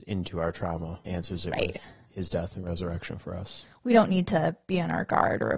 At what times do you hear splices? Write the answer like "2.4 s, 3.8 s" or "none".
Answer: 1.1 s